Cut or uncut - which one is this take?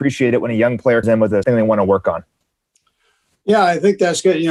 cut